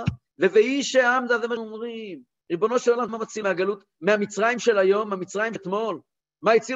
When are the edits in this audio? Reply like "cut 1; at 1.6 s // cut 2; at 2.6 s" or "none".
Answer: cut 1; at 1.6 s // cut 2; at 2.4 s // cut 3; at 3.1 s // cut 4; at 3.4 s // cut 5; at 5.6 s